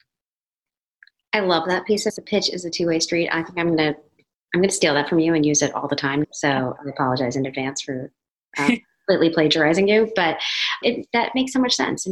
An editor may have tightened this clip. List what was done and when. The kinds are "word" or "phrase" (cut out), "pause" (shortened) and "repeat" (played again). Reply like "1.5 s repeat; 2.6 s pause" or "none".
2.1 s word; 6.2 s word; 10.8 s word